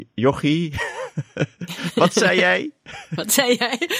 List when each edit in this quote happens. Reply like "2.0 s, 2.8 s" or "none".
none